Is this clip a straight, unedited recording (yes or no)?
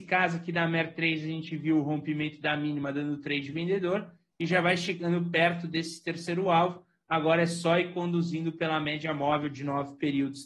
yes